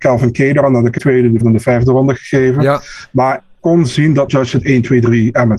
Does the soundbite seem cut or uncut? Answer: cut